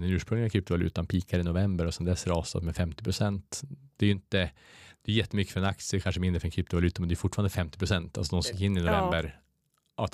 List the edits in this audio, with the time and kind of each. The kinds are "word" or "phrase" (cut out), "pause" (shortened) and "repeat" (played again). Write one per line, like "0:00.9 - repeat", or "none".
none